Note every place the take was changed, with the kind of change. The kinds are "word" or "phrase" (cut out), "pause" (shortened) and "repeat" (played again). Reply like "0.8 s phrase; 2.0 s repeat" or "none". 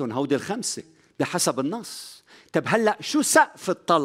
none